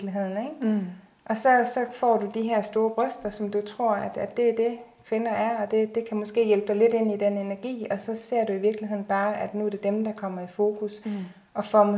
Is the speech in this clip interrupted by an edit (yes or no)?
no